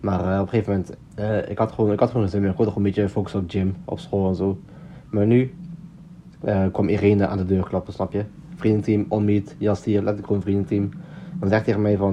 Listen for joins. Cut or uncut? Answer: cut